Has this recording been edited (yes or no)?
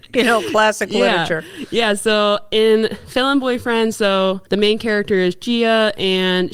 yes